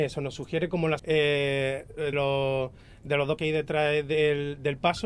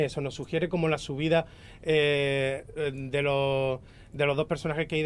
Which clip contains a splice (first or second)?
first